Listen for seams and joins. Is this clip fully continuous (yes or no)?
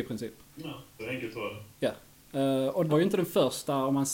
no